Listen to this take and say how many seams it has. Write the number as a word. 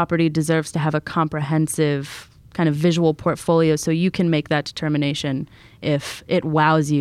zero